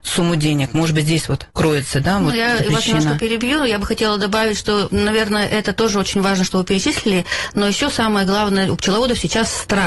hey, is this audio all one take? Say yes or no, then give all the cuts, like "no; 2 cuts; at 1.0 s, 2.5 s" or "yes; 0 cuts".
no; 1 cut; at 1.5 s